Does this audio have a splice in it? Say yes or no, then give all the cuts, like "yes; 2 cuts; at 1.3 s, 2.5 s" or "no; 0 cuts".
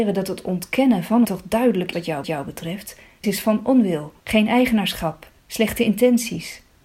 yes; 6 cuts; at 1.2 s, 1.9 s, 2.2 s, 3.2 s, 4.2 s, 5.4 s